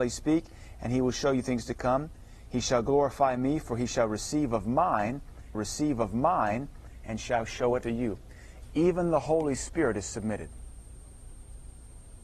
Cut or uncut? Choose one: cut